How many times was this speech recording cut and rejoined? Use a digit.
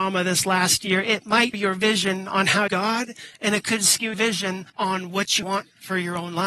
5